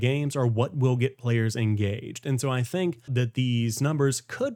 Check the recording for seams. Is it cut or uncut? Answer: cut